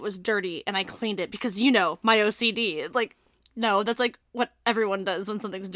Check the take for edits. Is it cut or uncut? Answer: uncut